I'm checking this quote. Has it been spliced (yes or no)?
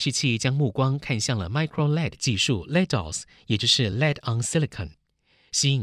no